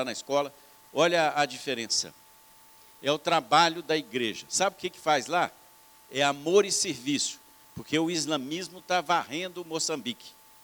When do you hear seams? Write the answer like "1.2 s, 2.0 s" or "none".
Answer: none